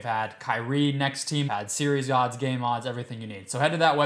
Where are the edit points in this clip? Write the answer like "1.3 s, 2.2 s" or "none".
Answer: 1.5 s